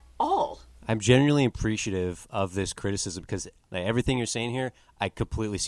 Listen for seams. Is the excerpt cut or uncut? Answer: uncut